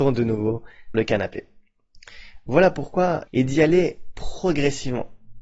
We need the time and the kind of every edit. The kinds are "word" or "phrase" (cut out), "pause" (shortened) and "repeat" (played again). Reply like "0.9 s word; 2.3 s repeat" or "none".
0.9 s word; 3.3 s word